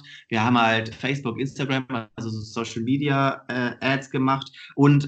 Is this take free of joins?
no; 1 cut; at 0.9 s

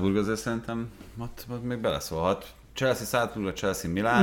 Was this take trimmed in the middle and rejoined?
no; 0 cuts

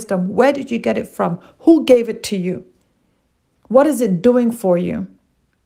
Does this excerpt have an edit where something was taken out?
no; 0 cuts

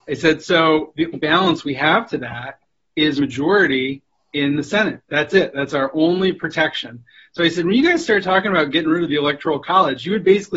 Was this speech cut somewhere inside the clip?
yes; 2 cuts; at 1.1 s, 3.2 s

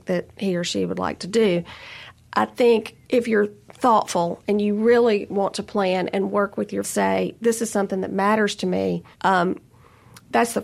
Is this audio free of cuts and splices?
no; 3 cuts; at 3.0 s, 6.8 s, 9.1 s

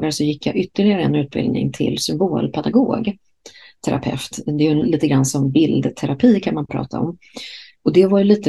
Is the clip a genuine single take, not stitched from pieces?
yes; 0 cuts

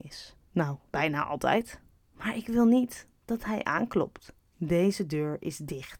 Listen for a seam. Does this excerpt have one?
no; 0 cuts

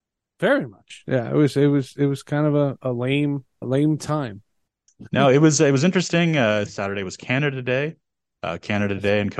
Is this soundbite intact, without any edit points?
no; 3 cuts; at 2.8 s, 3.6 s, 6.7 s

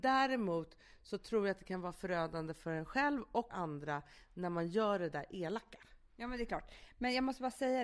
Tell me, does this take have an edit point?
yes; 1 cut; at 3.5 s

